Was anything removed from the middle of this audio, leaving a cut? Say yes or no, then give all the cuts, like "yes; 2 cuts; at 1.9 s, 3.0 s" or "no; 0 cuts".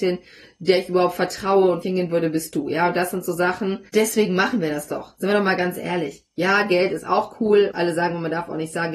yes; 3 cuts; at 1.8 s, 3.9 s, 7.7 s